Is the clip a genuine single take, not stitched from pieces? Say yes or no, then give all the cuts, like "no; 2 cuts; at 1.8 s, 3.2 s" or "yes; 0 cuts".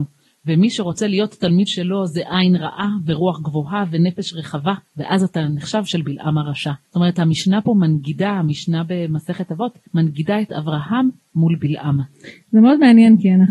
no; 5 cuts; at 1.7 s, 4.8 s, 5.8 s, 6.8 s, 9.9 s